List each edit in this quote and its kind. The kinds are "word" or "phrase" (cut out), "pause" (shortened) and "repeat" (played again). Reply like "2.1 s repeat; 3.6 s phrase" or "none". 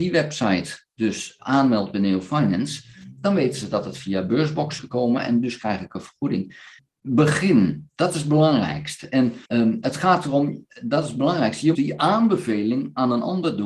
4.8 s word; 6.8 s pause; 9.5 s pause; 11.7 s word